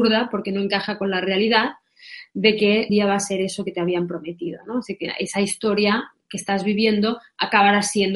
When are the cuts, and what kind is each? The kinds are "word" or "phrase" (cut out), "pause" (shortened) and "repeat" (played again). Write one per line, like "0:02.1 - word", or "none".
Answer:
0:02.9 - word